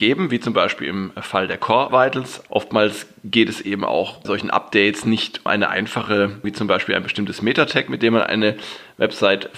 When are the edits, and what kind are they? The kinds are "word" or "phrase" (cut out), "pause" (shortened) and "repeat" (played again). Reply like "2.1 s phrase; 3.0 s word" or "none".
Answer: 1.9 s word; 2.5 s word; 4.2 s word; 5.5 s word; 6.4 s word